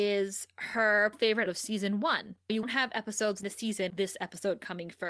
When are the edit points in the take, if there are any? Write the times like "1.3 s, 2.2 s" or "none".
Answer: 1.1 s, 1.5 s, 2.6 s, 3.4 s, 3.9 s